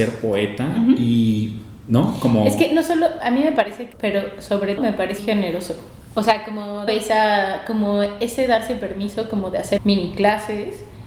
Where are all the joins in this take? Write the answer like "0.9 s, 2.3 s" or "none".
3.9 s, 4.8 s, 5.2 s, 6.9 s, 9.8 s